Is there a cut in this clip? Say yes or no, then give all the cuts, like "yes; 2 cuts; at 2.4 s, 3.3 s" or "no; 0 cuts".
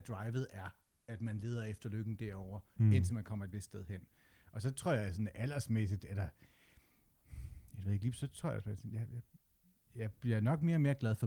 no; 0 cuts